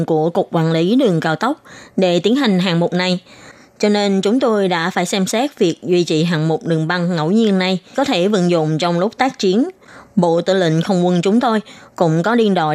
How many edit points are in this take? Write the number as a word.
one